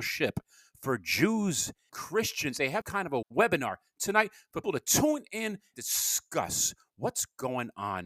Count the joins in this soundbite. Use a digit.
5